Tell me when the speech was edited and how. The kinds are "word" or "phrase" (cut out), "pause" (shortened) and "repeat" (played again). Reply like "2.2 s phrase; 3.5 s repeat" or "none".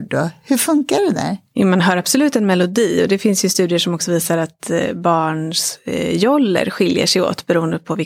1.5 s pause